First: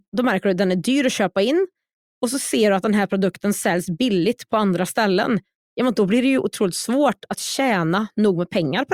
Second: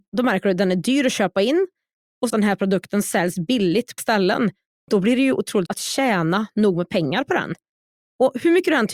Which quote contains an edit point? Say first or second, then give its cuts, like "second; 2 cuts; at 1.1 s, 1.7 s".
second; 4 cuts; at 2.3 s, 4.0 s, 4.9 s, 5.7 s